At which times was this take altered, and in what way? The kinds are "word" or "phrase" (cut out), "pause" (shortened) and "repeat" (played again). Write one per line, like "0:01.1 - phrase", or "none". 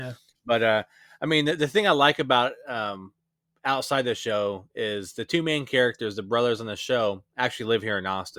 none